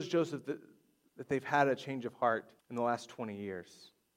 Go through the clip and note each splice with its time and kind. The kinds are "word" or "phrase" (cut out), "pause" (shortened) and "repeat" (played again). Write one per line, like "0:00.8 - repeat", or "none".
0:02.6 - pause